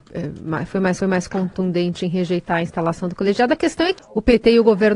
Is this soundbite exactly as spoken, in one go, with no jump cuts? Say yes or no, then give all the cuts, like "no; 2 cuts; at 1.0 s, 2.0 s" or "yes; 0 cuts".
no; 2 cuts; at 1.0 s, 4.0 s